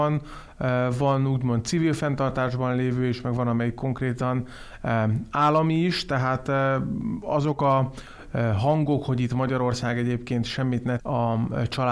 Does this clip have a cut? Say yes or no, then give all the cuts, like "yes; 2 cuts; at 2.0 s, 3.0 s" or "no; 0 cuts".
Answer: yes; 1 cut; at 11.0 s